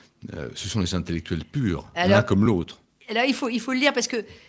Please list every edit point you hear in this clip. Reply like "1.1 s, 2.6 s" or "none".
none